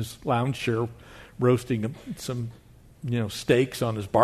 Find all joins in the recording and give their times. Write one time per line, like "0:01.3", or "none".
none

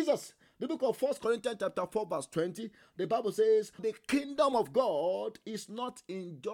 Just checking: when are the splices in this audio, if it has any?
0:03.8

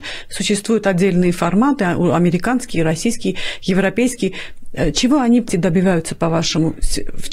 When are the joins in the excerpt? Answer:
0:05.5

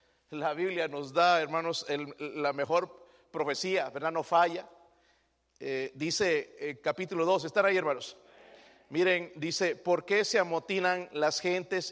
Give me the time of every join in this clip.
none

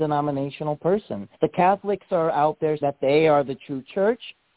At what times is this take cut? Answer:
0:01.3
0:02.8

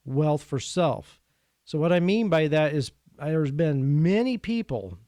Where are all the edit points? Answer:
none

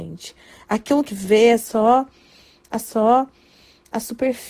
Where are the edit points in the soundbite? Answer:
0:01.1
0:02.8

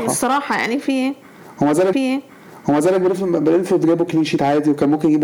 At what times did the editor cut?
0:01.9

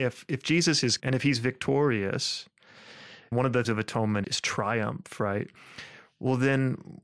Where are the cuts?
0:01.0
0:03.3
0:03.6
0:04.2

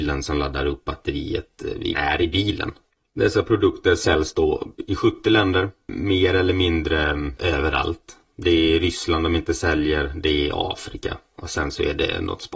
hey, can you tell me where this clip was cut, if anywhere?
0:01.9

